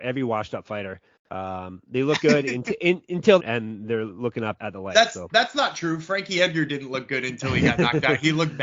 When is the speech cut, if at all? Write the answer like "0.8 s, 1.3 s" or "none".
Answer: 1.2 s, 3.4 s, 4.6 s